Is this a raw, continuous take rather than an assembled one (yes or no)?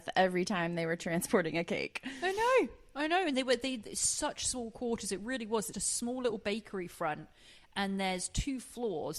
no